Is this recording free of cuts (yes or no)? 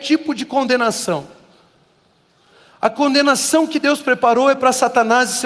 yes